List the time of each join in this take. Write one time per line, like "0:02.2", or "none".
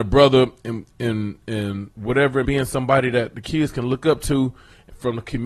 0:01.9
0:02.4

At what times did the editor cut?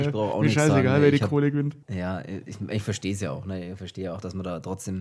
0:01.8

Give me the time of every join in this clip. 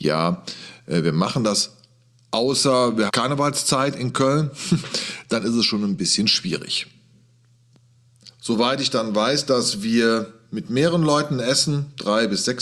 0:03.1

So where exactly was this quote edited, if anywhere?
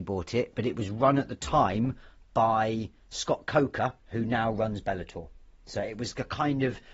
0:04.0

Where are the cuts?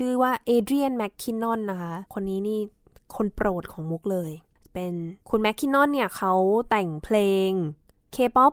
0:02.1
0:05.2

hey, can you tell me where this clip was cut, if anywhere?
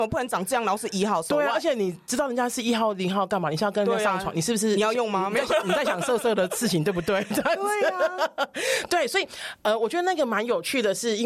none

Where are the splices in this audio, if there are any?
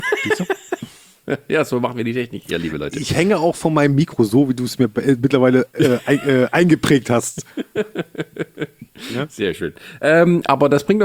none

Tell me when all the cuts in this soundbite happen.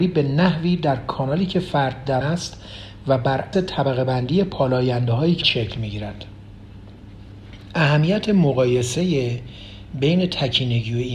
0:02.2
0:03.5
0:05.4

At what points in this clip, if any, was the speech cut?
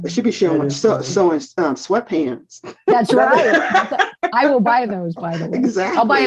none

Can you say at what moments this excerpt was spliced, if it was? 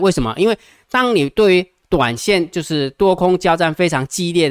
none

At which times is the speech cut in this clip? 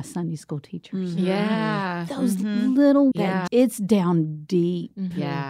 0:03.1
0:03.5

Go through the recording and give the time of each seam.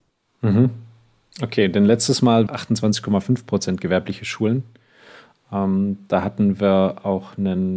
0:02.5

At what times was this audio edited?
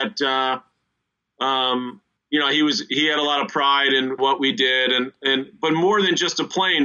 0:02.2
0:04.2

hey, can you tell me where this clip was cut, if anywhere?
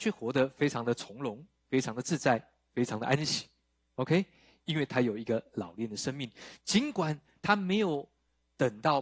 none

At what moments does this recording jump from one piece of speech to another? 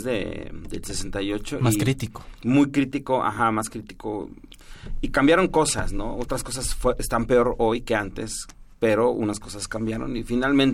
none

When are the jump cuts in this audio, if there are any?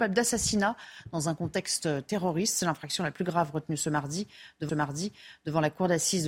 0:04.7

